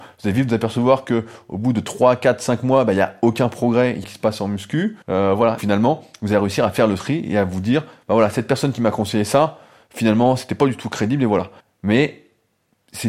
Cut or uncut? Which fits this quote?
cut